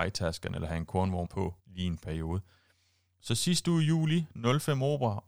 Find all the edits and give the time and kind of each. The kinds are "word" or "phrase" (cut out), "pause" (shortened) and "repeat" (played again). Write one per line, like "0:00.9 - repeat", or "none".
0:01.2 - word
0:01.6 - pause